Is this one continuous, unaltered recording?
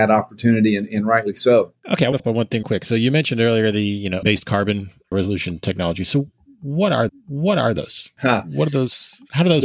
no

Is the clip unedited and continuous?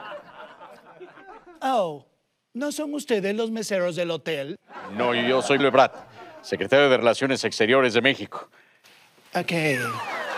no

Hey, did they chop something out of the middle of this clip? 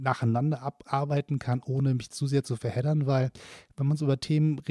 no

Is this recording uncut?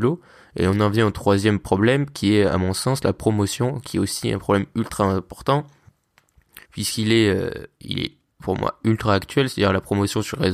no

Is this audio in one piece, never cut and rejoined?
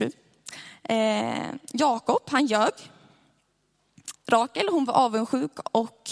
no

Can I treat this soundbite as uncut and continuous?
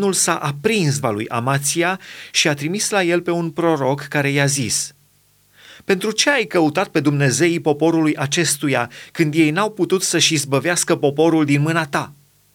no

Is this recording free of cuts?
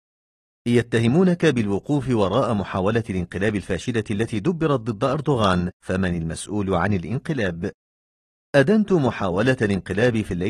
no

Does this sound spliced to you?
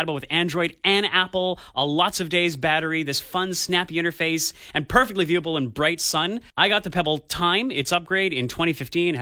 yes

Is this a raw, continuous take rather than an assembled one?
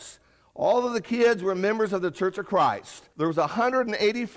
no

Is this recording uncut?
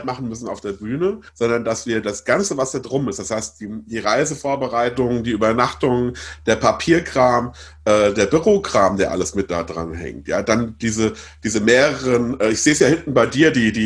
no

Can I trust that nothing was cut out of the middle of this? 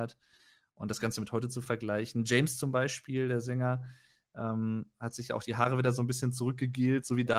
yes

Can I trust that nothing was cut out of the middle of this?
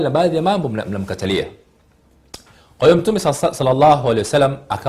yes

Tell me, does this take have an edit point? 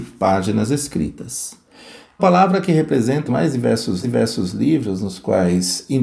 yes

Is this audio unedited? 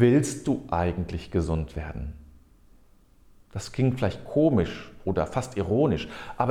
yes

